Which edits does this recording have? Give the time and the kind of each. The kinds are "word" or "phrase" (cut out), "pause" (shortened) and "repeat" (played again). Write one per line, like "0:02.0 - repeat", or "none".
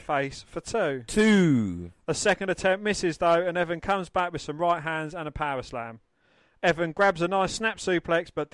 none